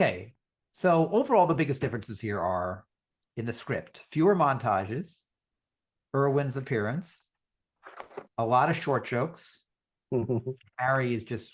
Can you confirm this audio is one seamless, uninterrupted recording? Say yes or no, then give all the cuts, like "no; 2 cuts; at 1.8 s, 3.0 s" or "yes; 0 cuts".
yes; 0 cuts